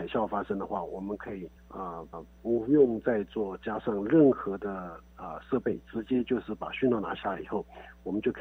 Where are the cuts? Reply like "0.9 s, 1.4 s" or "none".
1.6 s, 2.1 s